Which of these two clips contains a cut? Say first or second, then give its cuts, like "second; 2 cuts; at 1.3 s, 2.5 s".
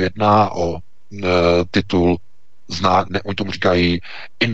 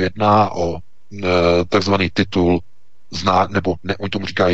first; 2 cuts; at 1.7 s, 3.1 s